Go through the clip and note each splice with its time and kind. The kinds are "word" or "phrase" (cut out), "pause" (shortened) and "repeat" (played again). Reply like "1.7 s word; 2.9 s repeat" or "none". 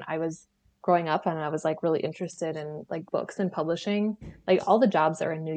3.1 s pause